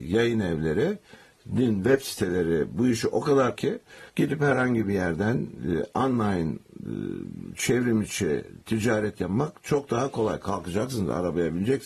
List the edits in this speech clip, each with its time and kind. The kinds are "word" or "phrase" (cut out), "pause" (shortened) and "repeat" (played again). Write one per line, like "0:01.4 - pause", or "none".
0:03.6 - word
0:04.1 - pause